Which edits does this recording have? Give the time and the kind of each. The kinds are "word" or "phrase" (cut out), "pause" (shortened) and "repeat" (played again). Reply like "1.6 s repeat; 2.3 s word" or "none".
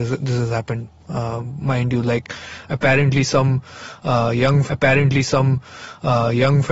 4.7 s repeat